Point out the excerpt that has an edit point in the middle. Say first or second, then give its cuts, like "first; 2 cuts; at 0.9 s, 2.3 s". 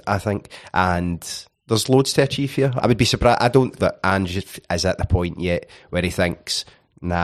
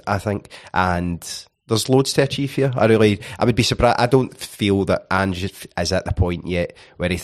first; 2 cuts; at 2.8 s, 3.8 s